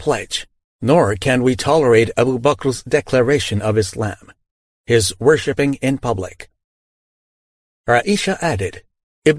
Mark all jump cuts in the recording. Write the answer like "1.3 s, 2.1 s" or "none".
none